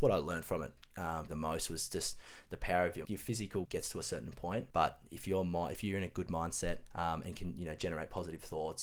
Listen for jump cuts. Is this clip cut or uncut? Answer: cut